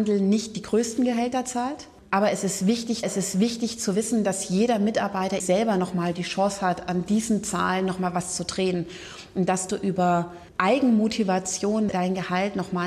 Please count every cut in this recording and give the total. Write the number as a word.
three